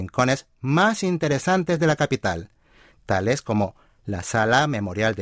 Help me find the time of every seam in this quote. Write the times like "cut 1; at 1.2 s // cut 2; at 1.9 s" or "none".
none